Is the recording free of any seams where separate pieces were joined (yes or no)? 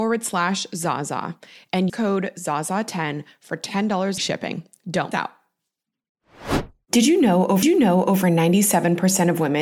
no